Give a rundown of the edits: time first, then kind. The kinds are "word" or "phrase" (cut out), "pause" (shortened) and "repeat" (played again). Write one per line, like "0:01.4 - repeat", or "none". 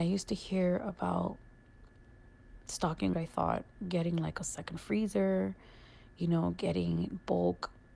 0:03.1 - phrase